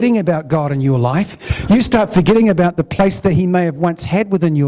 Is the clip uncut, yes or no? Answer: yes